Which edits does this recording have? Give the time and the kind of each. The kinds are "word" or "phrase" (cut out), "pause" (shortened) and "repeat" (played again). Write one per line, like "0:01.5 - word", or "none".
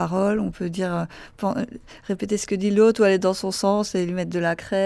none